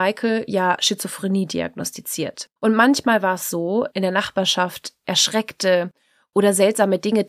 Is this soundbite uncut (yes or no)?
no